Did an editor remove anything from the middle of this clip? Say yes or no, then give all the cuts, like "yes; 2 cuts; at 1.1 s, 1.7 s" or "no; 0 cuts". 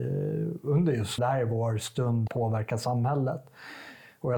yes; 2 cuts; at 1.2 s, 2.3 s